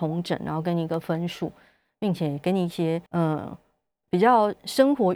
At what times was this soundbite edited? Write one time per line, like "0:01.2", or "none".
0:03.1